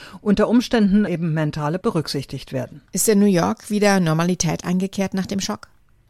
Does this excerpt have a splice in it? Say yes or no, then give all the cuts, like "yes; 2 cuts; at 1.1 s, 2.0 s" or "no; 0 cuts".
yes; 3 cuts; at 1.1 s, 1.8 s, 2.9 s